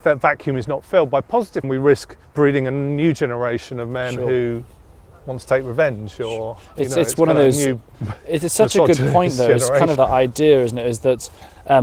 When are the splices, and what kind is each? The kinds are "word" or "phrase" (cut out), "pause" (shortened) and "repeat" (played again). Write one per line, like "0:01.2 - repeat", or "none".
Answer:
0:01.6 - phrase
0:06.6 - pause
0:10.0 - word